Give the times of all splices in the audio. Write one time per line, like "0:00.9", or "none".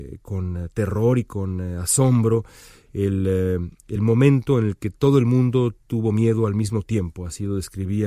none